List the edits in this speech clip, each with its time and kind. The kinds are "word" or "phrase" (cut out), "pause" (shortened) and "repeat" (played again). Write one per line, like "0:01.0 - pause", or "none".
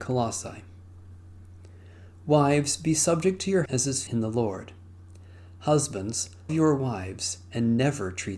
0:03.7 - word
0:04.1 - word
0:06.5 - word